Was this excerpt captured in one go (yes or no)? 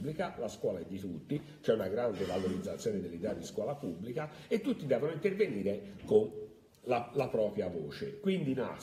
yes